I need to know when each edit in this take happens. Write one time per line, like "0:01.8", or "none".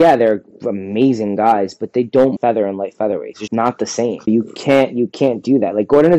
0:02.4
0:03.5
0:04.3